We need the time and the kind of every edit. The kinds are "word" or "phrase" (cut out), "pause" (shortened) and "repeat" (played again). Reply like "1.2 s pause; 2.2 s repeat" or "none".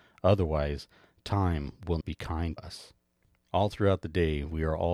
2.0 s word; 2.6 s word